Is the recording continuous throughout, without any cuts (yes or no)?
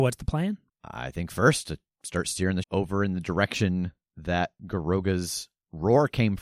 no